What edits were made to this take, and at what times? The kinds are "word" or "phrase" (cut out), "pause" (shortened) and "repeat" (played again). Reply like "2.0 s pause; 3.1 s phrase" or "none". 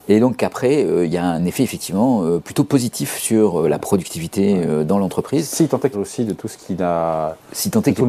5.9 s phrase